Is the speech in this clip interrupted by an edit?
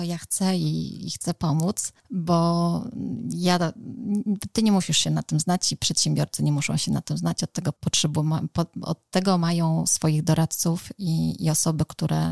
yes; 2 cuts; at 2.0 s, 7.8 s

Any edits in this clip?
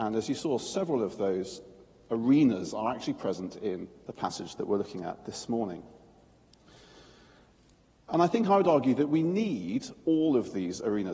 no; 0 cuts

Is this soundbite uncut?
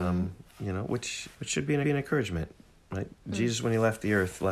no; 2 cuts; at 1.3 s, 1.8 s

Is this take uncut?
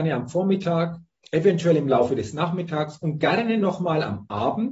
yes; 0 cuts

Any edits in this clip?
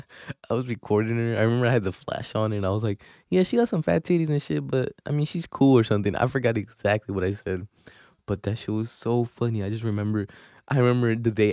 no; 0 cuts

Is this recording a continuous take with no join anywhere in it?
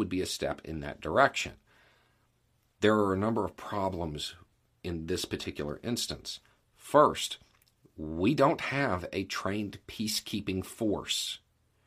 yes; 0 cuts

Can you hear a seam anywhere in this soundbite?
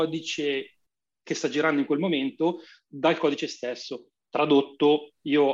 no; 0 cuts

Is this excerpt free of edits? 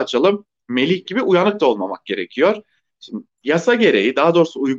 no; 1 cut; at 1.0 s

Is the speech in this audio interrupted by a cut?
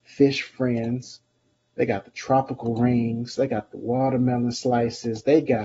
no; 0 cuts

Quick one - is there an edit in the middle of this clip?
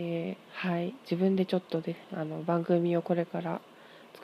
yes; 1 cut; at 2.0 s

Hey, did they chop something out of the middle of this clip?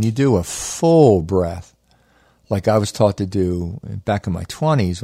no; 0 cuts

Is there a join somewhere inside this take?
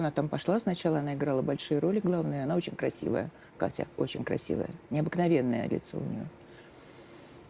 yes; 1 cut; at 4.8 s

